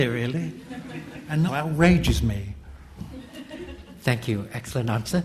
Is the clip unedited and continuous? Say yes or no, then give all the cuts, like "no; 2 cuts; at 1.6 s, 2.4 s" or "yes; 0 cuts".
no; 1 cut; at 1.5 s